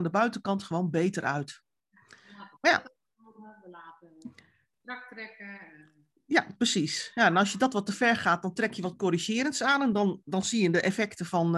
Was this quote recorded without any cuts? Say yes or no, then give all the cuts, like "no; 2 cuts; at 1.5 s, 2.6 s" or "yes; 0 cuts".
yes; 0 cuts